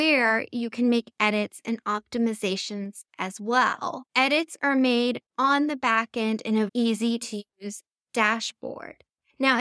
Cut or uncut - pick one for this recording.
cut